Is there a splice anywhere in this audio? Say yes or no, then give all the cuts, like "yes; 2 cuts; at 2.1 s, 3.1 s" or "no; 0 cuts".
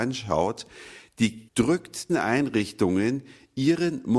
yes; 2 cuts; at 1.5 s, 2.1 s